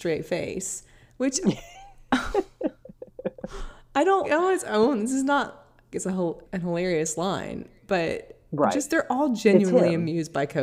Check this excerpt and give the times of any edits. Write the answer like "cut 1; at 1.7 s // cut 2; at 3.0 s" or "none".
cut 1; at 4.2 s // cut 2; at 5.9 s // cut 3; at 6.4 s